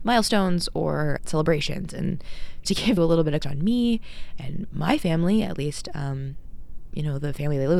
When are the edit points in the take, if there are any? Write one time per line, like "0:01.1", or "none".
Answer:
0:01.2
0:02.6
0:03.0
0:03.4